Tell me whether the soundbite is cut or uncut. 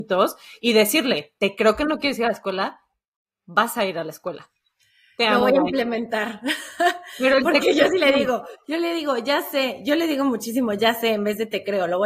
uncut